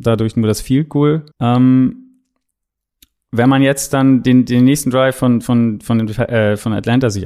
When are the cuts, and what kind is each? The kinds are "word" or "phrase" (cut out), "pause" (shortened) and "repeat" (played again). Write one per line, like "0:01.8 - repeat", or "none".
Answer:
0:01.3 - pause